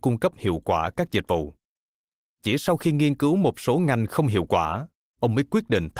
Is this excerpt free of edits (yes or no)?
yes